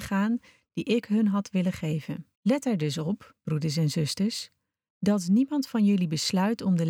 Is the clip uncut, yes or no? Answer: no